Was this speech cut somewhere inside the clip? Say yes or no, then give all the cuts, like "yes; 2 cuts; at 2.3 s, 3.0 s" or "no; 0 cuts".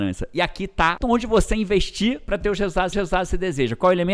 yes; 2 cuts; at 1.0 s, 2.9 s